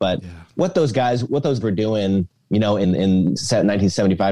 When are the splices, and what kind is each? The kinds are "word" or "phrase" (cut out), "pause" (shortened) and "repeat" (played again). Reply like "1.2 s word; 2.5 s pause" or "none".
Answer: 1.6 s word; 2.8 s word